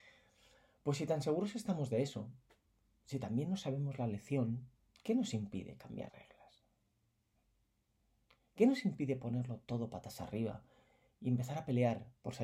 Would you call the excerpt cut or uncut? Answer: cut